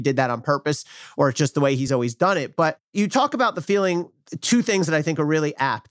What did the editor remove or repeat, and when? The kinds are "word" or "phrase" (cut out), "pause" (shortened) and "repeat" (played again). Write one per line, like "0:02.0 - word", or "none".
none